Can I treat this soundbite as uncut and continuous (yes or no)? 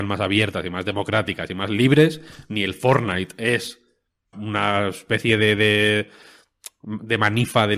no